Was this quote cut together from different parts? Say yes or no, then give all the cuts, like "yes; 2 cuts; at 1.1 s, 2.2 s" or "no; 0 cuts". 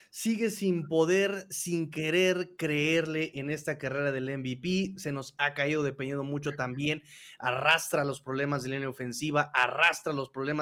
no; 0 cuts